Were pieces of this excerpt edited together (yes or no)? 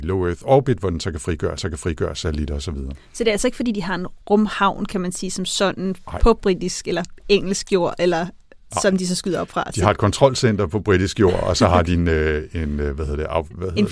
yes